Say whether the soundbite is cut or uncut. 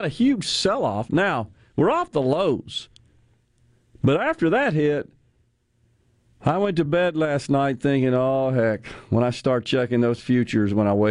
uncut